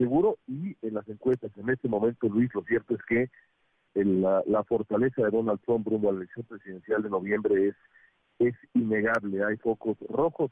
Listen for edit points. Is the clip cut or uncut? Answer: cut